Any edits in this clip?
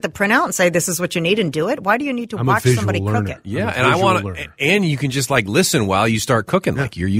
no; 0 cuts

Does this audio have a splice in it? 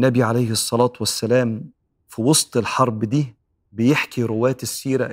no; 0 cuts

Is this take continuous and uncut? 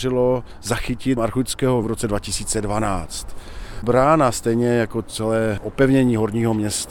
no; 2 cuts; at 1.2 s, 1.8 s

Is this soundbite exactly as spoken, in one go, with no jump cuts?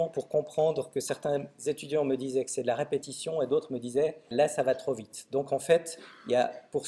no; 1 cut; at 4.3 s

